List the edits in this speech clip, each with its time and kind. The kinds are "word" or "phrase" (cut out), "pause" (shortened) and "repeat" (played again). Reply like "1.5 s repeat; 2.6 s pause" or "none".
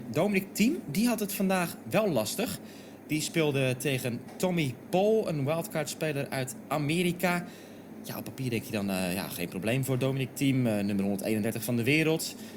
none